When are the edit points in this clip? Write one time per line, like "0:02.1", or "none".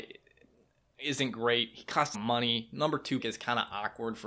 0:02.1
0:03.2